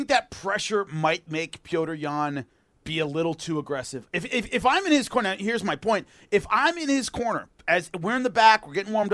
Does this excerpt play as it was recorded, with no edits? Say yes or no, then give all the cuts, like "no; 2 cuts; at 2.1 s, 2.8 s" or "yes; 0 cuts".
yes; 0 cuts